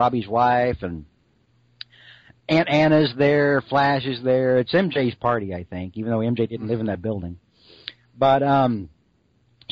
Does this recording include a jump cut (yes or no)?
no